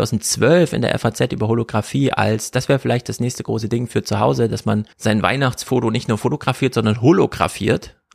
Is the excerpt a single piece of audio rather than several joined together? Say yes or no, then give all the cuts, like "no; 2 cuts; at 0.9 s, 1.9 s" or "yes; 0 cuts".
no; 1 cut; at 4.9 s